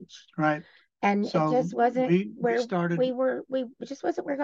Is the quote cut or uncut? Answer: uncut